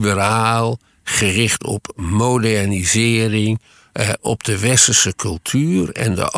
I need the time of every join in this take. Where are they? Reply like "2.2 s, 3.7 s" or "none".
none